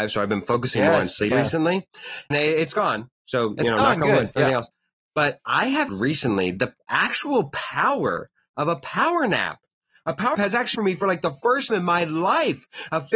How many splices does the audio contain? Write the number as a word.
seven